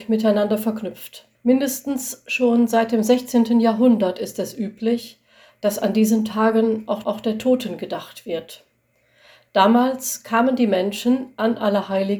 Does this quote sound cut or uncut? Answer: cut